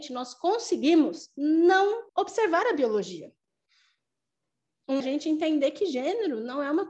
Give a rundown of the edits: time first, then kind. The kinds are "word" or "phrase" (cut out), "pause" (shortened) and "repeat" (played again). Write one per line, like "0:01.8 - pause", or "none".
0:02.1 - pause
0:05.0 - phrase